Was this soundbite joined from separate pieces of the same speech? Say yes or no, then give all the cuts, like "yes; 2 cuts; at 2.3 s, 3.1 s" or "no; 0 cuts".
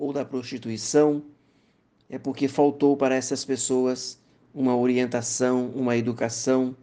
no; 0 cuts